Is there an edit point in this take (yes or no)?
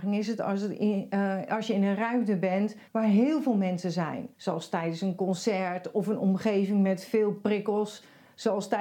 yes